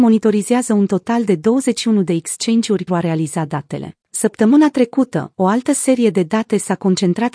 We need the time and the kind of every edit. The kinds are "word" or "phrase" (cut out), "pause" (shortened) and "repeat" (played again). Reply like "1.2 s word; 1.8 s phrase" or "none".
2.9 s word; 4.0 s pause